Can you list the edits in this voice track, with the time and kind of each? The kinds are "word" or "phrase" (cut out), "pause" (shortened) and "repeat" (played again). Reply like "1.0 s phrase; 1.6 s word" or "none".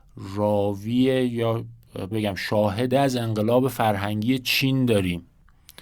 2.1 s word; 2.9 s word